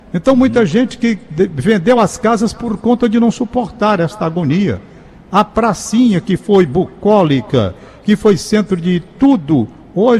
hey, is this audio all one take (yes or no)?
yes